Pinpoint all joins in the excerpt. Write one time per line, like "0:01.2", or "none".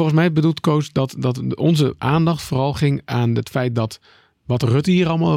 none